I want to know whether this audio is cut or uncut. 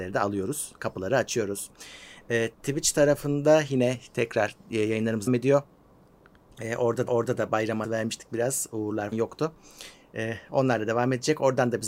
cut